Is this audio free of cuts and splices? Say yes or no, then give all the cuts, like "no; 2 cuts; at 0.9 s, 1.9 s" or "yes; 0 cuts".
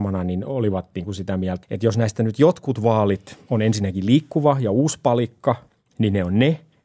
no; 1 cut; at 1.6 s